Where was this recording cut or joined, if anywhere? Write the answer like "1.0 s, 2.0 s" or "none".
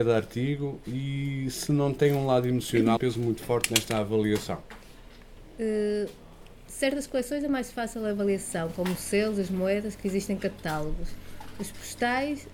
3.0 s